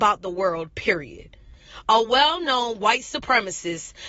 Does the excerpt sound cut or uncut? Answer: uncut